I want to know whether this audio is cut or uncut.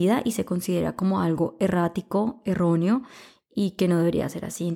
uncut